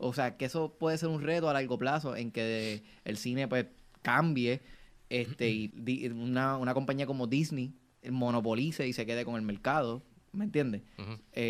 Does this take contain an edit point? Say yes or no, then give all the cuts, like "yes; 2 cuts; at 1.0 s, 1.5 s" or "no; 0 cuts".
yes; 1 cut; at 5.7 s